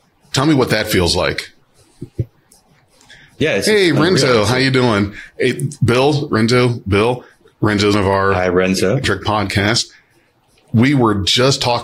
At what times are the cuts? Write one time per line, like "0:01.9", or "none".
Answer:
0:06.3
0:07.9
0:09.0